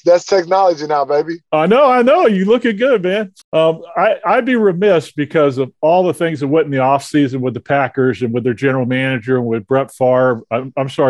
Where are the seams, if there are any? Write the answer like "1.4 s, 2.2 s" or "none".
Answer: 3.4 s